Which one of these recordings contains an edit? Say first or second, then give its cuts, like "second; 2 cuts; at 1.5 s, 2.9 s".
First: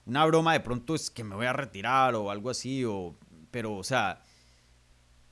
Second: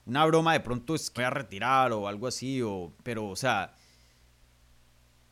second; 2 cuts; at 1.2 s, 3.0 s